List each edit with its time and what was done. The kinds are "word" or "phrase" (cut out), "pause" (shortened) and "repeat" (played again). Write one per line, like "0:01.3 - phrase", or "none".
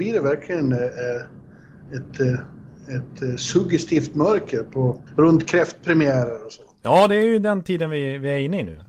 0:05.1 - pause